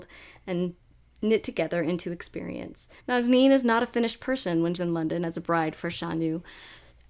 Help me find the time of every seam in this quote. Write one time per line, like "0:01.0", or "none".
0:03.0
0:04.7